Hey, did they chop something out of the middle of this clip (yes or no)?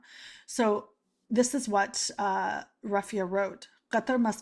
no